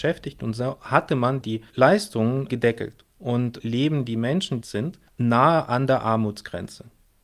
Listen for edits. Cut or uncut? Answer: cut